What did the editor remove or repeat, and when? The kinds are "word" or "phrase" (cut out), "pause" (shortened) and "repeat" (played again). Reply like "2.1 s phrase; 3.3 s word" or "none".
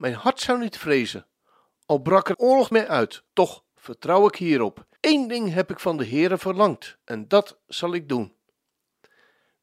2.3 s word; 2.7 s word; 3.3 s pause; 5.0 s pause; 7.0 s pause